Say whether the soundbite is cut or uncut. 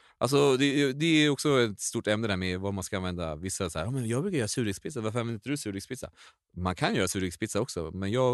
uncut